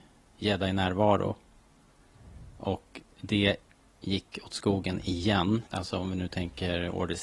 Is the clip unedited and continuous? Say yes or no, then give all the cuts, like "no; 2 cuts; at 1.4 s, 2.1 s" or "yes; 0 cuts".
no; 2 cuts; at 3.1 s, 5.7 s